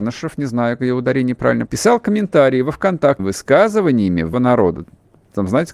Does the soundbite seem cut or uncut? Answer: cut